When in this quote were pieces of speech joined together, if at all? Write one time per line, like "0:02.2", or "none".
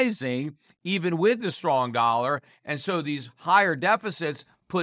none